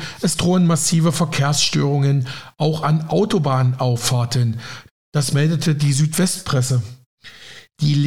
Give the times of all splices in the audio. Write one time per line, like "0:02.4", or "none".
none